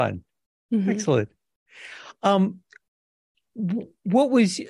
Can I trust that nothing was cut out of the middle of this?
yes; 0 cuts

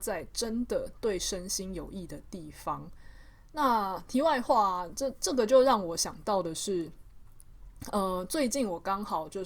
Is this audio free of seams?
yes; 0 cuts

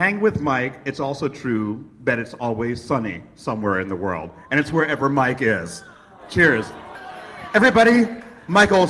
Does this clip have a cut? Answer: no; 0 cuts

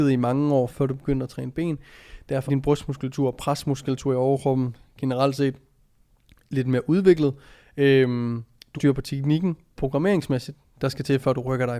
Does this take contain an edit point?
yes; 3 cuts; at 2.5 s, 8.7 s, 9.8 s

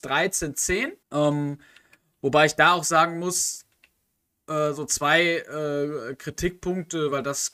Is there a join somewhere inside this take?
yes; 1 cut; at 1.0 s

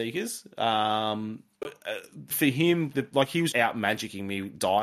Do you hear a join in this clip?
yes; 4 cuts; at 1.6 s, 2.3 s, 2.9 s, 3.5 s

